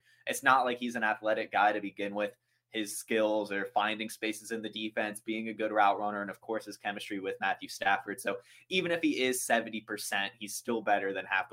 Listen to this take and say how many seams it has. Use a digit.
0